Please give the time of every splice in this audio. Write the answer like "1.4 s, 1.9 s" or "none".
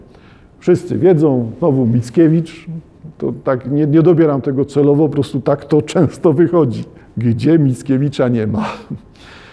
none